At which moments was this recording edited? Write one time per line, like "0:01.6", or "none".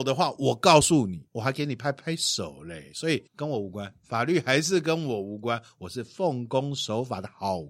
0:01.3
0:03.3